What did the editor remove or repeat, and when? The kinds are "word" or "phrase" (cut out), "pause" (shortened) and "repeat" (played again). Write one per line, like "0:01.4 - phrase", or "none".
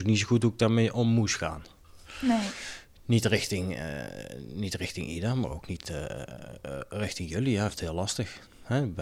0:07.7 - word